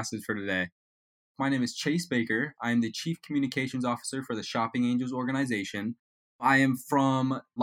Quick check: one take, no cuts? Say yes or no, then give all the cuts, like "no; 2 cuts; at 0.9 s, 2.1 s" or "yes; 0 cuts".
yes; 0 cuts